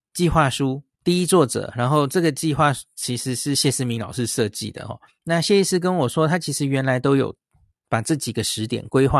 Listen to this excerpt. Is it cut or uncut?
cut